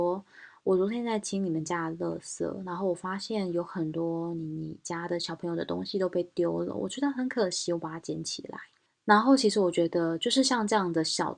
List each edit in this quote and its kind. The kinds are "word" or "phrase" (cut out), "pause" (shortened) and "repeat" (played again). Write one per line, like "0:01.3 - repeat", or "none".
0:08.9 - pause